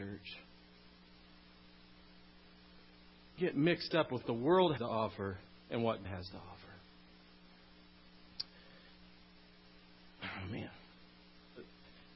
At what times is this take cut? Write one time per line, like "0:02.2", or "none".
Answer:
0:03.4
0:04.2
0:04.8
0:06.0